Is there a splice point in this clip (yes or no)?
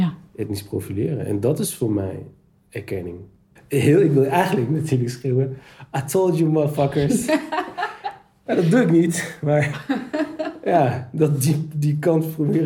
no